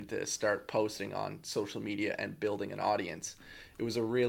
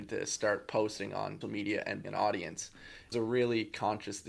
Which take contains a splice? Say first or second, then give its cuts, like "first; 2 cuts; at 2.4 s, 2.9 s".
second; 3 cuts; at 1.4 s, 2.0 s, 3.1 s